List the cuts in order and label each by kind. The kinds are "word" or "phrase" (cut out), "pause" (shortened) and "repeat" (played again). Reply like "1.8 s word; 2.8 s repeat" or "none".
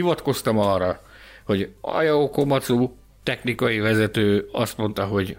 none